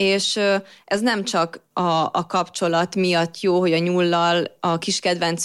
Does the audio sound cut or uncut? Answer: cut